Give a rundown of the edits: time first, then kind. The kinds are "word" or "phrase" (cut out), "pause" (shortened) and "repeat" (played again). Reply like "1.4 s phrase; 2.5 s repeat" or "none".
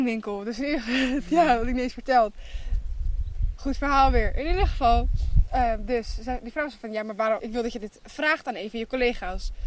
7.4 s word